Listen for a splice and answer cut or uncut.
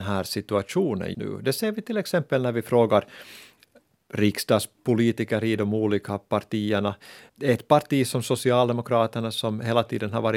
cut